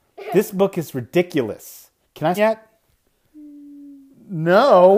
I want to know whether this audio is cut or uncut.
cut